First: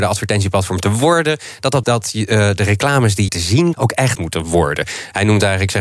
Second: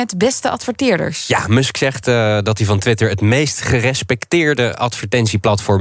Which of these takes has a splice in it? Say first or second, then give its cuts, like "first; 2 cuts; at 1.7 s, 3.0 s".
first; 4 cuts; at 1.8 s, 3.3 s, 3.7 s, 4.1 s